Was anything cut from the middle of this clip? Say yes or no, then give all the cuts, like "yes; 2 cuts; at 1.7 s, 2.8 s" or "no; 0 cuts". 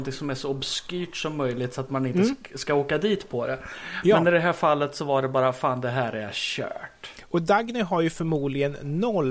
no; 0 cuts